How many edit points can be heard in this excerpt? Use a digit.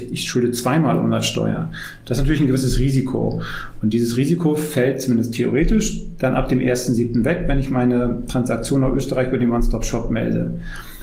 0